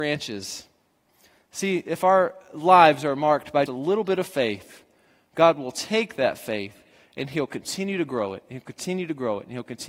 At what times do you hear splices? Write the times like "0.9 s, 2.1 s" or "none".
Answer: 3.7 s